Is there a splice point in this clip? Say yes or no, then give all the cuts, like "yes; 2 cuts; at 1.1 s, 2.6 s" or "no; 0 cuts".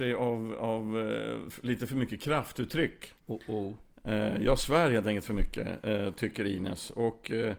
yes; 1 cut; at 3.2 s